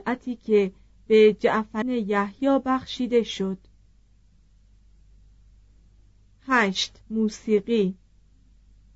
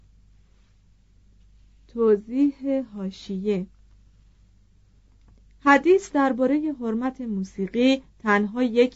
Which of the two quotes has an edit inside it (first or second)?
first